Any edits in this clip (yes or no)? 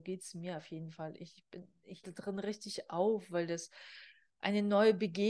yes